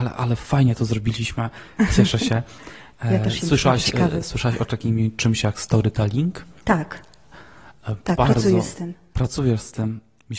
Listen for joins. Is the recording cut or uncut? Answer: uncut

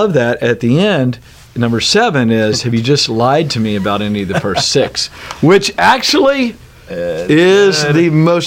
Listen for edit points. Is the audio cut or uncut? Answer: uncut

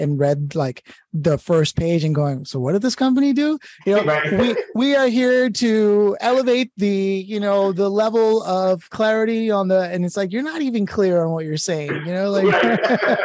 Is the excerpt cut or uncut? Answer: uncut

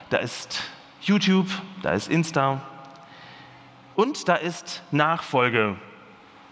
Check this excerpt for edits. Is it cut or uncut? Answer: uncut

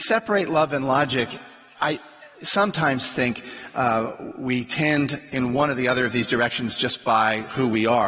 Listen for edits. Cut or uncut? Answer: uncut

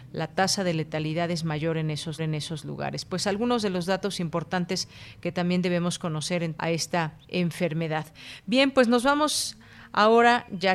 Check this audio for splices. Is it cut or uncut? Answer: cut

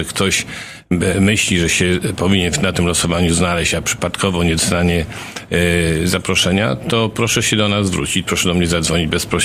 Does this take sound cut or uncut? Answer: uncut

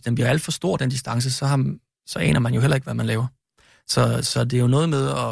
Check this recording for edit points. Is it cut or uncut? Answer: uncut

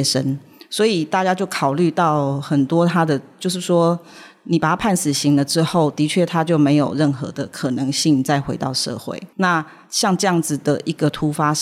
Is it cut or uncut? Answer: uncut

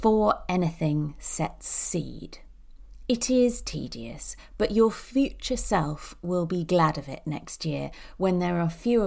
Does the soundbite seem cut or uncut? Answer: uncut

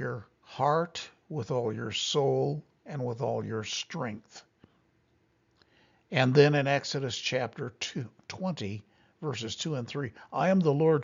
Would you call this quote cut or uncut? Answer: uncut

